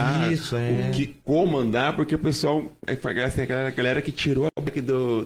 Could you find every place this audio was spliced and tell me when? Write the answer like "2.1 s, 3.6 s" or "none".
1.2 s, 2.8 s